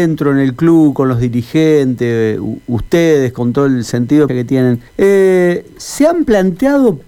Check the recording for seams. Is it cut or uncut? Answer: cut